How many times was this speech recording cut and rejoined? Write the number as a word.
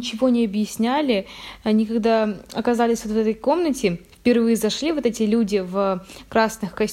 zero